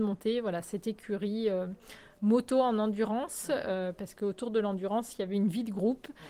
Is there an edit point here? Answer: no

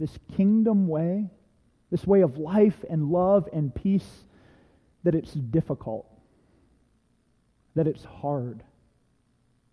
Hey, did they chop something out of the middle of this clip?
no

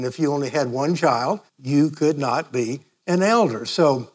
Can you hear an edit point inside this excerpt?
yes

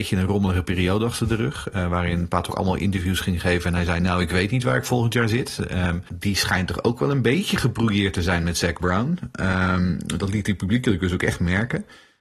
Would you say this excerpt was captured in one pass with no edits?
no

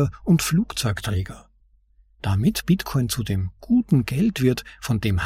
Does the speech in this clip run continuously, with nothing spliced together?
yes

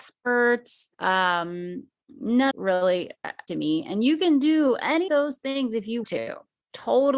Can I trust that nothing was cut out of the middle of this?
no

